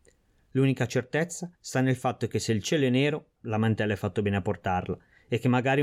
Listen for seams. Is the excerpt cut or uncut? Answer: cut